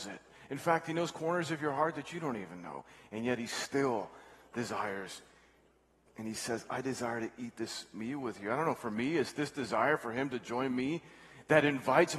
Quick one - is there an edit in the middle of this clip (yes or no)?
no